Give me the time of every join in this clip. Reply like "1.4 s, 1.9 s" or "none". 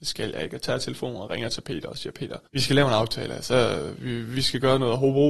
2.4 s